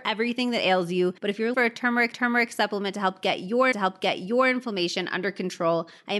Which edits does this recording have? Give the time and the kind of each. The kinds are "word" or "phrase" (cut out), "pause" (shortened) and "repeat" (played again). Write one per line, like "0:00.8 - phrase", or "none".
0:01.2 - pause
0:01.5 - word
0:02.1 - repeat
0:03.7 - repeat